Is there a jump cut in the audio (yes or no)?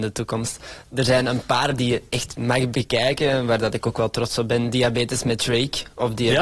yes